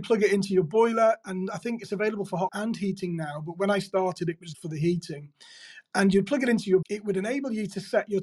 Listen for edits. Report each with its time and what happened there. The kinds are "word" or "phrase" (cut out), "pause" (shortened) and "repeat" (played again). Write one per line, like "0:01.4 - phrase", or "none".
0:02.5 - word
0:04.5 - word
0:06.8 - word